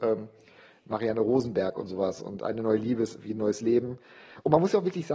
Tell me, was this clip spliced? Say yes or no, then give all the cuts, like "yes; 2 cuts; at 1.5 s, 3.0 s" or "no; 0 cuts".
no; 0 cuts